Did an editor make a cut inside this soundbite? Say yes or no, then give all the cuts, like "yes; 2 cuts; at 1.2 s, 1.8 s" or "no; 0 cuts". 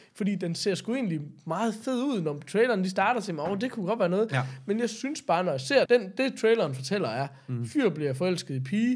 yes; 1 cut; at 5.9 s